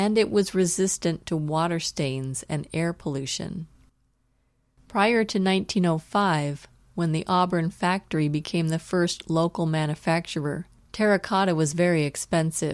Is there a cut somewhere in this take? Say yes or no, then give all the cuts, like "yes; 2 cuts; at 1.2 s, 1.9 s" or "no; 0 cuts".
no; 0 cuts